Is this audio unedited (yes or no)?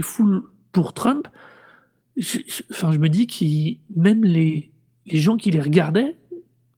yes